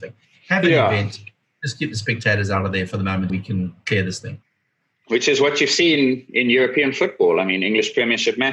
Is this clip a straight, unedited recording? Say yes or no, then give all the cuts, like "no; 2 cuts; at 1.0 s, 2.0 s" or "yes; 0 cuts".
no; 1 cut; at 3.3 s